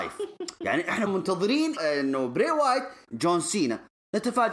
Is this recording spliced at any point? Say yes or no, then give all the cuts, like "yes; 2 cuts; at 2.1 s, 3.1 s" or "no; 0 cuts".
yes; 3 cuts; at 1.1 s, 1.8 s, 3.1 s